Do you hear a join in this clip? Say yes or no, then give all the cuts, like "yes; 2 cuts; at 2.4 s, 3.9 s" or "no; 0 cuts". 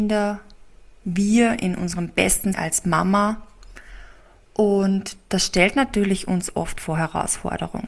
yes; 1 cut; at 2.5 s